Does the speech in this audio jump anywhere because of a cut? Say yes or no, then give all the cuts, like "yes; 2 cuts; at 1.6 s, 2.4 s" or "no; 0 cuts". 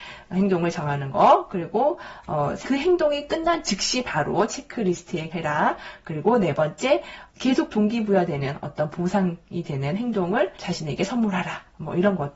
yes; 4 cuts; at 2.6 s, 5.3 s, 7.3 s, 10.6 s